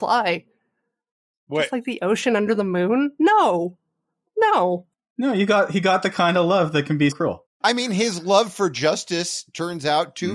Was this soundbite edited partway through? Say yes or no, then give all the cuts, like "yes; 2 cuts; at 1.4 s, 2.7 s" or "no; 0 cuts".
yes; 1 cut; at 7.1 s